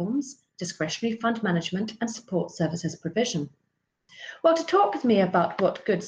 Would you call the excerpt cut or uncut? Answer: uncut